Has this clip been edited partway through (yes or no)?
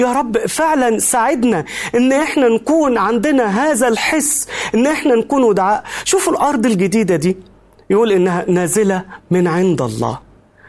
no